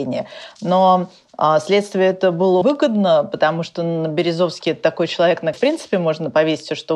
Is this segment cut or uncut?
cut